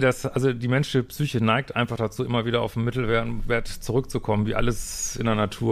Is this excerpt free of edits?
yes; 0 cuts

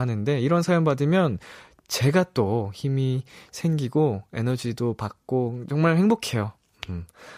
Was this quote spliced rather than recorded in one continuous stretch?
no; 0 cuts

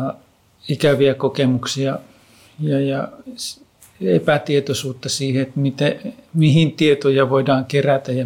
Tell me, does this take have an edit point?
no; 0 cuts

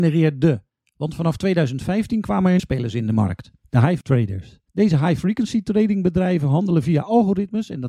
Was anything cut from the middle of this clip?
yes; 4 cuts; at 2.6 s, 3.6 s, 4.0 s, 4.7 s

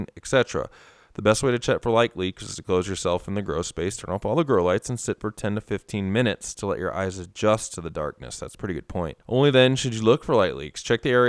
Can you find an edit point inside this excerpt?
yes; 1 cut; at 9.2 s

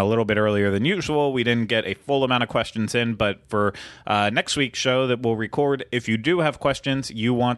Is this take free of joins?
yes; 0 cuts

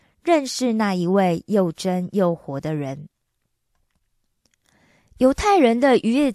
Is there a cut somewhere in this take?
no; 0 cuts

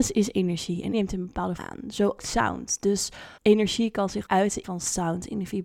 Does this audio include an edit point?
yes; 6 cuts; at 0.9 s, 1.6 s, 2.2 s, 3.4 s, 4.2 s, 4.6 s

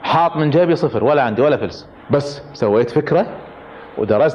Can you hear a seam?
no; 0 cuts

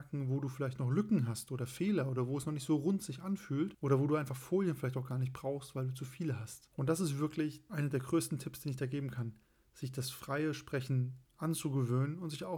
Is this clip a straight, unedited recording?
yes; 0 cuts

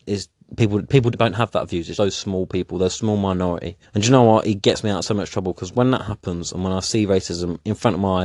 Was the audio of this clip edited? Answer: yes; 3 cuts; at 1.1 s, 1.9 s, 3.8 s

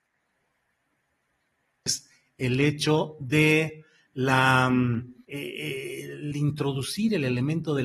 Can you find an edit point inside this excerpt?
yes; 1 cut; at 5.2 s

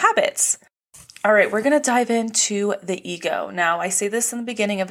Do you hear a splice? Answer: no; 0 cuts

